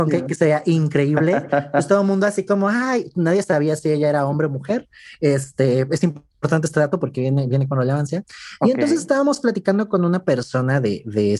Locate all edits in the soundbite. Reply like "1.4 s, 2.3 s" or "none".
none